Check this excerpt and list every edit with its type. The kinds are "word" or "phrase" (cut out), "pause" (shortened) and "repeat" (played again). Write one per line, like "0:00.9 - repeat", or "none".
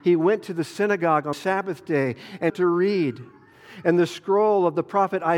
0:01.3 - word
0:02.5 - phrase